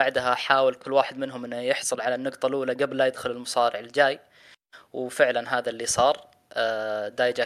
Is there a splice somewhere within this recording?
no; 0 cuts

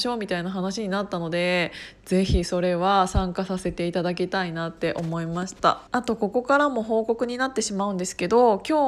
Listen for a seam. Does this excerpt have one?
yes; 1 cut; at 5.9 s

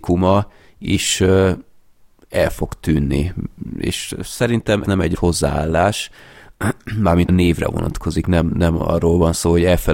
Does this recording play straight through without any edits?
no; 3 cuts; at 4.8 s, 5.2 s, 7.3 s

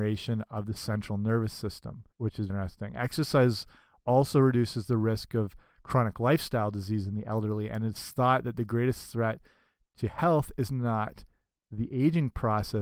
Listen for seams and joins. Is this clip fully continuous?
no; 2 cuts; at 2.1 s, 2.5 s

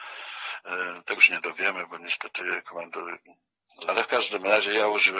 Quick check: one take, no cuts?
no; 2 cuts; at 1.2 s, 3.9 s

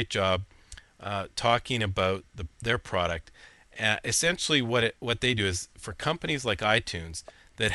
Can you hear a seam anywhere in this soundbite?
no; 0 cuts

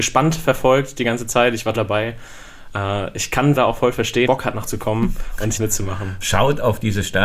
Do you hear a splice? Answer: yes; 5 cuts; at 1.7 s, 3.6 s, 4.3 s, 4.6 s, 5.6 s

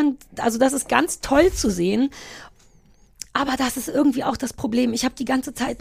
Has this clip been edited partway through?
no; 0 cuts

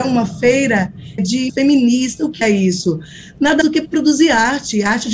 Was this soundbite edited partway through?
yes; 4 cuts; at 1.2 s, 1.5 s, 2.4 s, 3.6 s

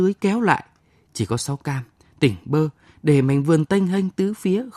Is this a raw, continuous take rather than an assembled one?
yes; 0 cuts

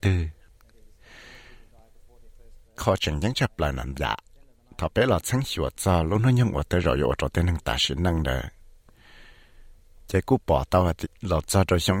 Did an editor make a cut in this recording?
yes; 3 cuts; at 2.8 s, 3.9 s, 11.0 s

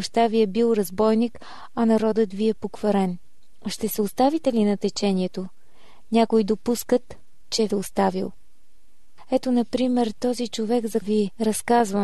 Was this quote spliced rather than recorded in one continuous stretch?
yes; 2 cuts; at 7.7 s, 11.0 s

